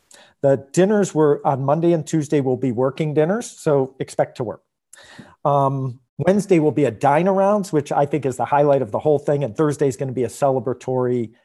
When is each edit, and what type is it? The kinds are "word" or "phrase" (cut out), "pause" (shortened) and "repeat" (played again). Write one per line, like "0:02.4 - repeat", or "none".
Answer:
0:06.1 - pause